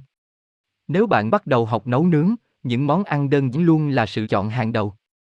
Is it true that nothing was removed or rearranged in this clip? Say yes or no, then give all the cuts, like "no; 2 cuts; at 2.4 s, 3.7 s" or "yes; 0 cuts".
no; 3 cuts; at 1.3 s, 3.5 s, 4.2 s